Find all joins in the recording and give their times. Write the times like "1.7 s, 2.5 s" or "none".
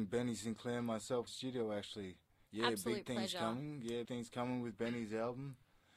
1.3 s, 2.5 s, 4.0 s